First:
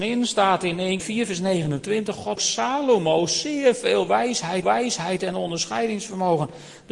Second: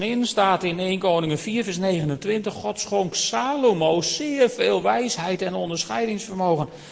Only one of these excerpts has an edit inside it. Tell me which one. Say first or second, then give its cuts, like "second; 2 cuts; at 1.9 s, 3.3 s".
first; 3 cuts; at 1.0 s, 2.4 s, 4.6 s